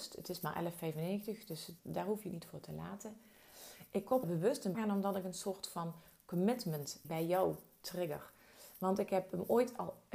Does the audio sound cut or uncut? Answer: cut